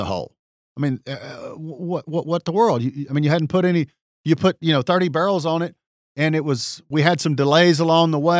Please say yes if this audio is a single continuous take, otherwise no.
yes